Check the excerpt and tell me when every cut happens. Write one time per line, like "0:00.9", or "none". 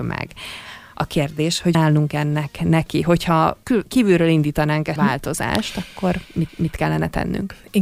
0:01.7
0:03.6
0:05.0
0:06.5

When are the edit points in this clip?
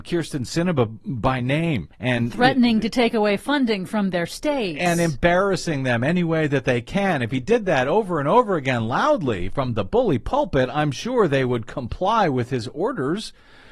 0:01.9

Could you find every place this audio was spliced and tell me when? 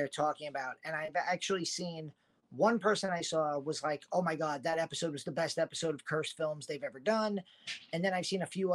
none

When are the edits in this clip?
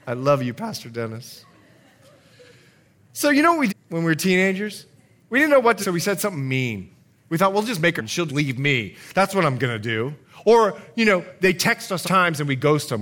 0:03.7
0:05.8
0:08.0
0:08.3
0:12.0

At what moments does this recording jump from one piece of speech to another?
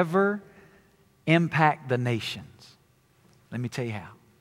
none

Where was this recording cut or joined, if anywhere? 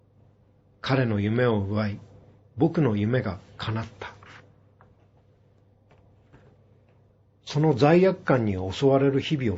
none

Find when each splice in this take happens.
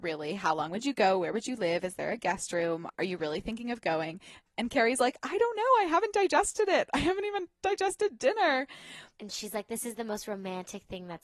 0:02.9

